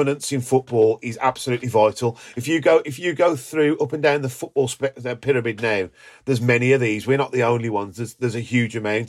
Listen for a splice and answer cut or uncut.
uncut